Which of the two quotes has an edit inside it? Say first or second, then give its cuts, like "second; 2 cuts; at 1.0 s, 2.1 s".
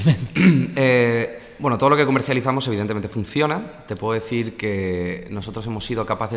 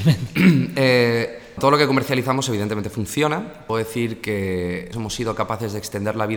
second; 3 cuts; at 1.6 s, 3.7 s, 4.9 s